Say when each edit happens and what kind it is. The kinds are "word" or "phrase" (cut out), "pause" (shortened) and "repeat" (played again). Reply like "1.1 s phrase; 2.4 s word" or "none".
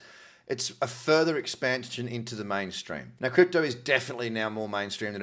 3.2 s pause

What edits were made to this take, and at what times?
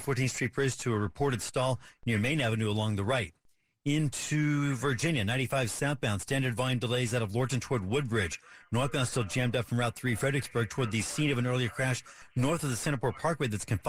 none

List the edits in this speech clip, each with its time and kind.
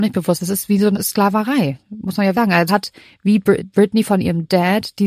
0.9 s word; 2.3 s word; 2.7 s word; 3.6 s word

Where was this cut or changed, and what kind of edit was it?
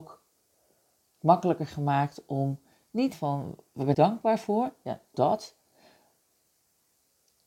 3.1 s phrase; 3.9 s word; 5.1 s word

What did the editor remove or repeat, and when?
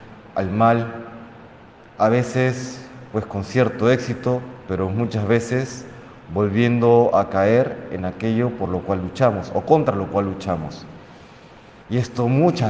none

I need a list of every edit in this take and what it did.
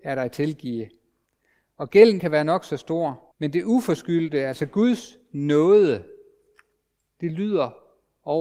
2.2 s word; 3.3 s pause

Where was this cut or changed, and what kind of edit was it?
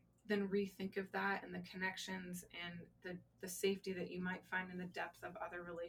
none

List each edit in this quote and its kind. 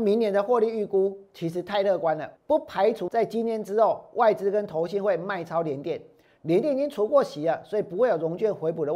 2.4 s pause; 3.1 s word

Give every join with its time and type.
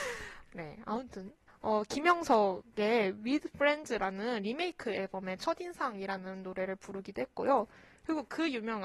1.5 s pause

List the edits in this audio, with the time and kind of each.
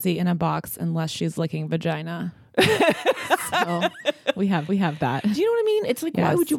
4.7 s repeat

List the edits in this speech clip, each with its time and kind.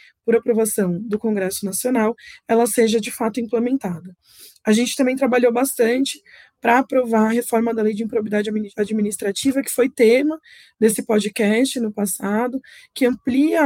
none

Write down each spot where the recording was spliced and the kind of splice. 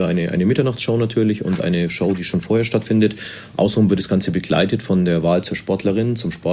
none

